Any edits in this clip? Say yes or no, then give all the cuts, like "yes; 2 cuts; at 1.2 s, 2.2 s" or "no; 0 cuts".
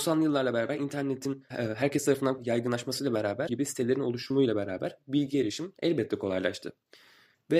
yes; 3 cuts; at 1.5 s, 2.4 s, 3.5 s